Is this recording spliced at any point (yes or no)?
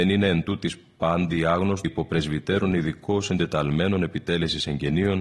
yes